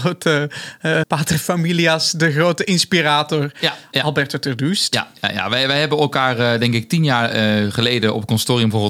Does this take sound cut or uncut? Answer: cut